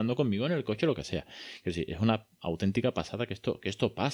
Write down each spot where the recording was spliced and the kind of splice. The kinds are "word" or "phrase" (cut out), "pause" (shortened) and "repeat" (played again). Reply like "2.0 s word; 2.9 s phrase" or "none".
none

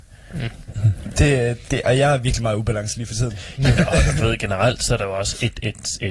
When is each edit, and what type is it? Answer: 1.7 s word

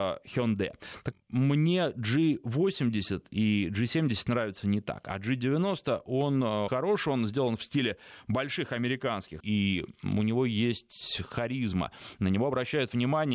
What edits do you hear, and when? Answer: 1.1 s word; 6.7 s word; 9.4 s word

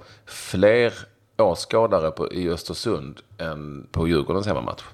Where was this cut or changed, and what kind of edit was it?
3.9 s word

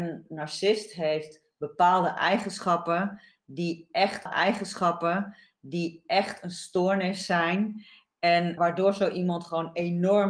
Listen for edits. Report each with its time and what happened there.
4.3 s repeat; 8.6 s word

